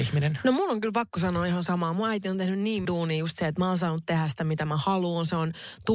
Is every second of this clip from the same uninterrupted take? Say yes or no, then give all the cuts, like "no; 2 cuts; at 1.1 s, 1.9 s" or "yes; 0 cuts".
no; 1 cut; at 2.8 s